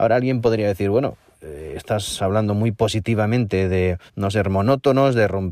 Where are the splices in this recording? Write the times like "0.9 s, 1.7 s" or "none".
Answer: 4.1 s